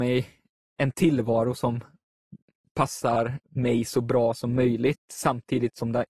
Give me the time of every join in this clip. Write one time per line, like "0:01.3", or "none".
none